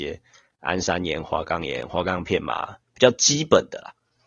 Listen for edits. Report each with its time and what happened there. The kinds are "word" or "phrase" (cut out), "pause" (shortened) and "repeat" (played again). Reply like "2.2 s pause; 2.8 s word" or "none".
2.8 s pause